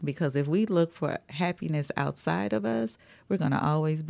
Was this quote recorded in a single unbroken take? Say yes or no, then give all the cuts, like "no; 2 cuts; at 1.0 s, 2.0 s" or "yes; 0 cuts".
yes; 0 cuts